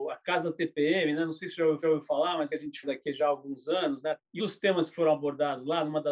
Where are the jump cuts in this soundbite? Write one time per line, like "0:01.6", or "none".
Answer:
0:01.8
0:02.5
0:02.8
0:04.4

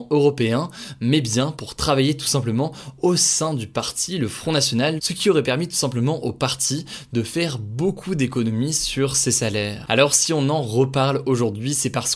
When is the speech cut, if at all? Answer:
0:05.0

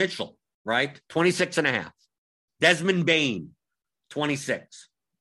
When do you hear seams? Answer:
0:01.1

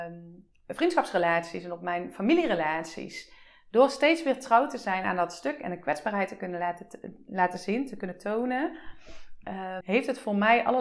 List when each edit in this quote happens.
0:09.8

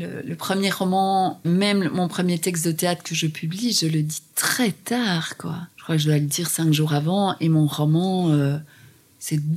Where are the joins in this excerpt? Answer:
0:01.4
0:05.7

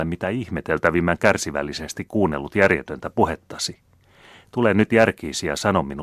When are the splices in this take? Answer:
none

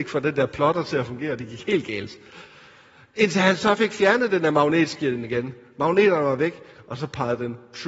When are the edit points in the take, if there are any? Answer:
none

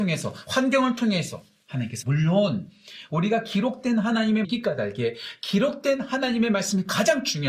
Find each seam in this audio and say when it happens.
0:02.0
0:04.4

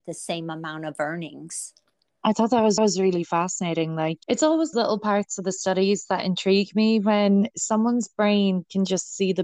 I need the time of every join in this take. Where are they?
0:01.9
0:02.8
0:04.2
0:04.7

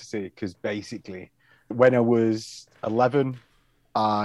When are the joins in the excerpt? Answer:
0:01.7

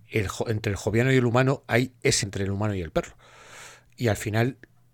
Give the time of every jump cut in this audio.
0:02.2

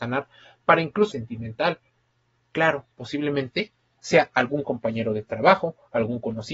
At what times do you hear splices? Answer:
0:01.1
0:02.9

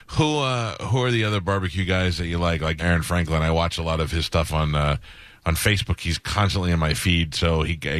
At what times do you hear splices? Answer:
0:02.8

